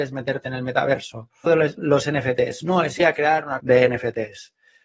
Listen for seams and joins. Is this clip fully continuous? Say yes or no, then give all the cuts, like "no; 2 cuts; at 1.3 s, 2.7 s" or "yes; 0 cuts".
no; 3 cuts; at 1.5 s, 3.0 s, 3.6 s